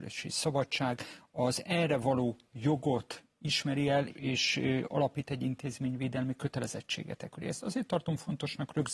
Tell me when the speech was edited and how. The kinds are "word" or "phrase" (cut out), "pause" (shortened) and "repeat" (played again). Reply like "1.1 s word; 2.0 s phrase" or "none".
4.1 s word